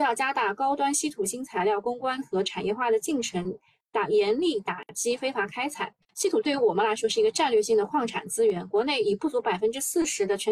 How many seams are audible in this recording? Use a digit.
1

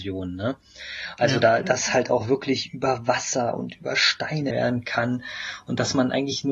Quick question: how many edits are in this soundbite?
1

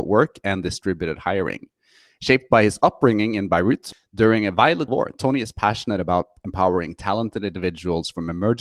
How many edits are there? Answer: 1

